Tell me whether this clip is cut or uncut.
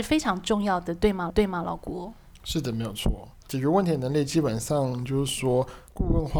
cut